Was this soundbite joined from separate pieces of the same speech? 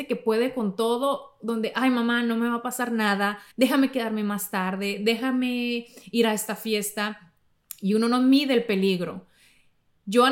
yes; 1 cut; at 3.5 s

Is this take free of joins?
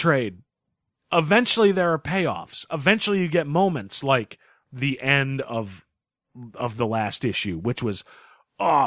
yes; 0 cuts

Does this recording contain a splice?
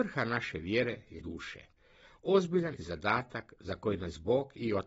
yes; 2 cuts; at 1.2 s, 2.8 s

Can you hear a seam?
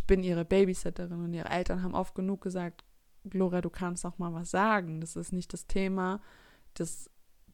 no; 0 cuts

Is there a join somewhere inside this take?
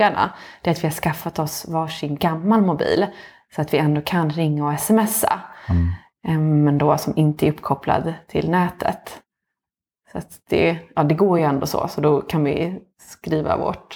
no; 0 cuts

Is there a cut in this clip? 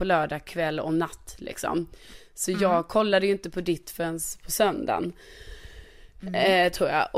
no; 0 cuts

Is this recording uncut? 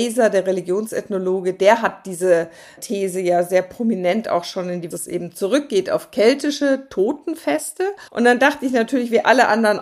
no; 3 cuts; at 2.8 s, 4.9 s, 8.1 s

